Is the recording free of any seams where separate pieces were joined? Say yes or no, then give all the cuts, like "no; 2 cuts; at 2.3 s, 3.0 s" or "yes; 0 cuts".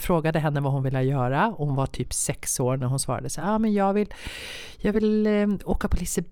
yes; 0 cuts